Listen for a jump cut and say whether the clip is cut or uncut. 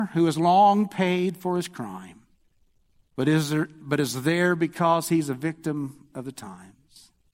uncut